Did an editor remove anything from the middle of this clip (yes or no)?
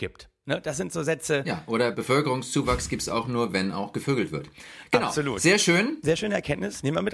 no